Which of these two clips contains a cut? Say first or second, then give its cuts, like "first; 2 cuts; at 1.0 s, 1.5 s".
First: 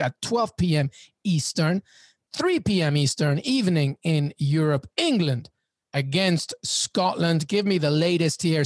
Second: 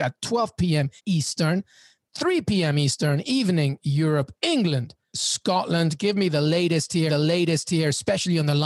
second; 4 cuts; at 1.0 s, 3.8 s, 5.1 s, 7.1 s